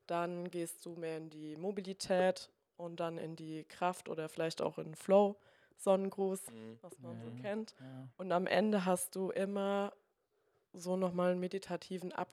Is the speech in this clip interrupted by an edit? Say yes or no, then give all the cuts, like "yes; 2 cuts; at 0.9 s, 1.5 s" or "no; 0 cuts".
no; 0 cuts